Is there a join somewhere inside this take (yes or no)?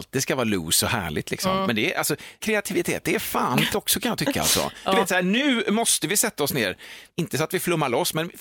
yes